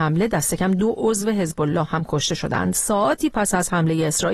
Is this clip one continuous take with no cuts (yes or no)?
yes